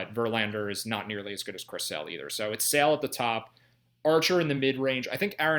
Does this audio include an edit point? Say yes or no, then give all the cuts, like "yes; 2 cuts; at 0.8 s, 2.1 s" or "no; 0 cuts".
no; 0 cuts